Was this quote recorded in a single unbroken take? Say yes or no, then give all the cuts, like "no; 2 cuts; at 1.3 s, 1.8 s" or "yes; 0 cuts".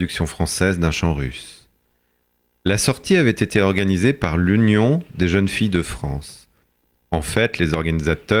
yes; 0 cuts